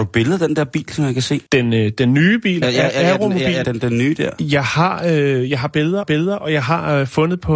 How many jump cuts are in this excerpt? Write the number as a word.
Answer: four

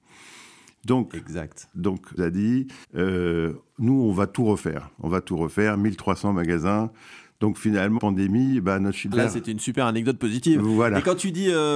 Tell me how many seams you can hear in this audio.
five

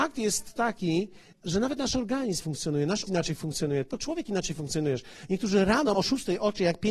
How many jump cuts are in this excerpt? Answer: five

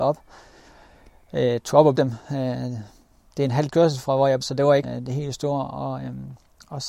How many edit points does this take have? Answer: four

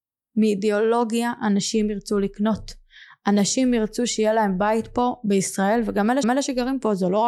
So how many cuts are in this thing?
one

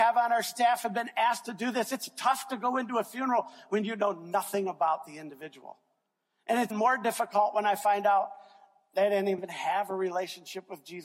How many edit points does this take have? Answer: two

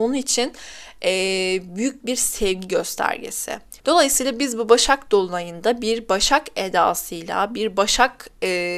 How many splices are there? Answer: one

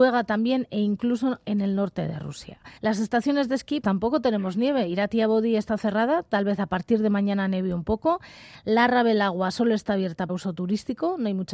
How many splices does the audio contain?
three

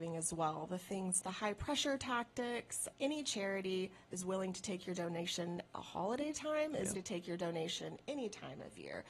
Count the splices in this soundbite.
five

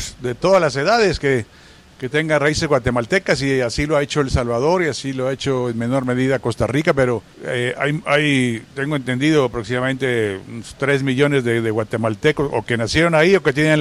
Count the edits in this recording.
one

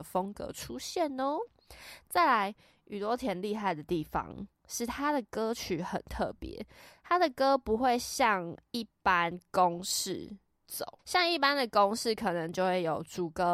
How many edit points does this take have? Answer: one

